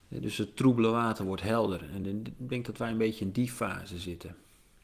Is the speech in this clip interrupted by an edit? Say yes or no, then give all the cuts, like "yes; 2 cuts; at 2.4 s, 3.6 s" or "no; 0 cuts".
no; 0 cuts